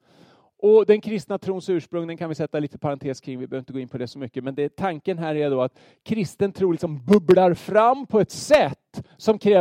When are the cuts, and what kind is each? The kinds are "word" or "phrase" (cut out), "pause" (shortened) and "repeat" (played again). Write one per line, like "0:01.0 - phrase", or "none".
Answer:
none